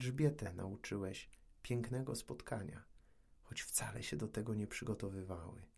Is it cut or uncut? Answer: uncut